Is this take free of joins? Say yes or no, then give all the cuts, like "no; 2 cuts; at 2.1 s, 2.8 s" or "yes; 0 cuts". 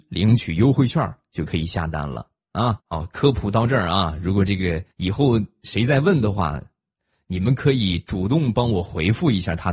no; 2 cuts; at 2.8 s, 4.9 s